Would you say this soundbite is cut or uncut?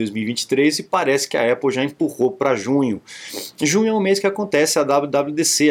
uncut